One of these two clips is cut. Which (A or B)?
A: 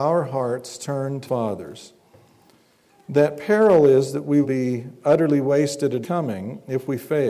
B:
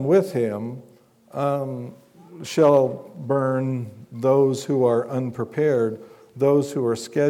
A